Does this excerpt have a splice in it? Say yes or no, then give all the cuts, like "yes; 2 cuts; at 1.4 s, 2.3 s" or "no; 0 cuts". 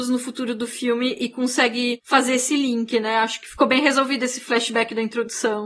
no; 0 cuts